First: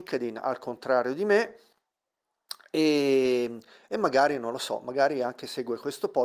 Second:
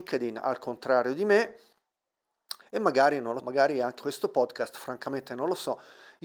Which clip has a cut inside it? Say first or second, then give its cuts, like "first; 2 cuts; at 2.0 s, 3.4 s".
second; 3 cuts; at 2.6 s, 3.4 s, 4.0 s